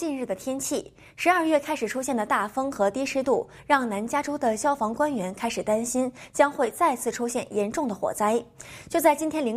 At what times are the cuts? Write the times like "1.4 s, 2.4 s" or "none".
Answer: none